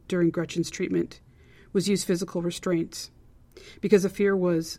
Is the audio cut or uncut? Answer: uncut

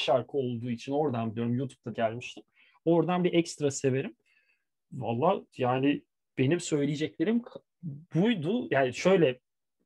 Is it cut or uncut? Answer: cut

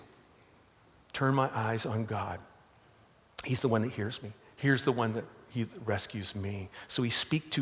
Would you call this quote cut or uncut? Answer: uncut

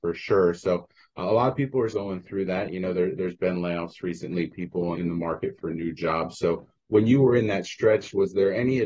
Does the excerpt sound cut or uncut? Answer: cut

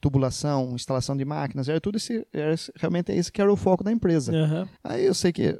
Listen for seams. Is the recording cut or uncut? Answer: uncut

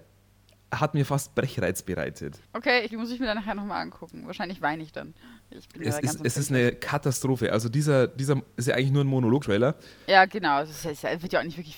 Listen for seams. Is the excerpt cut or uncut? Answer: cut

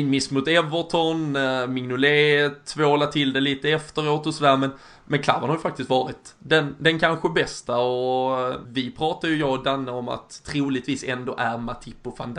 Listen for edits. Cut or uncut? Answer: cut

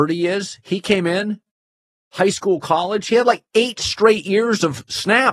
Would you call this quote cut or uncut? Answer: uncut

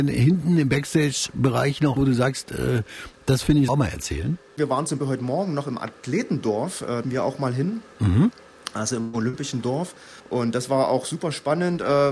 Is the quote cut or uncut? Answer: cut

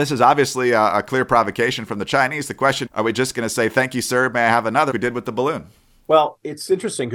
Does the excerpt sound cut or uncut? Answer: cut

